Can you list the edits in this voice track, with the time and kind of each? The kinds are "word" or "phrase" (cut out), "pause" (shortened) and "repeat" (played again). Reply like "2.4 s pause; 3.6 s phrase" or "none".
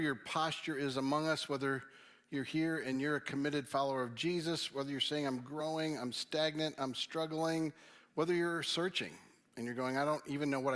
none